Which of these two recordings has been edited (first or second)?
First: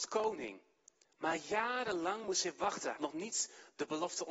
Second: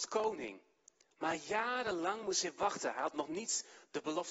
first